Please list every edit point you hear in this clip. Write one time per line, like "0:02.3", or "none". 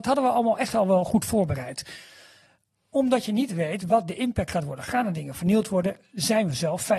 none